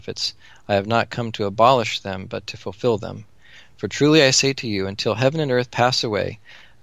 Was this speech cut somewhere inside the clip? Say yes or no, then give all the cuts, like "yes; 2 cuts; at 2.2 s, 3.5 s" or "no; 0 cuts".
no; 0 cuts